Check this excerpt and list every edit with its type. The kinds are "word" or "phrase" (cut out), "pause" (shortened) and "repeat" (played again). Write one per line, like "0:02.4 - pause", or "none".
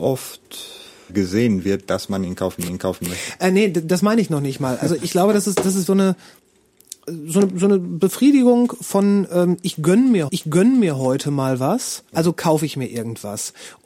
0:01.1 - word
0:02.7 - repeat
0:05.0 - word
0:05.9 - word
0:10.3 - repeat
0:12.1 - pause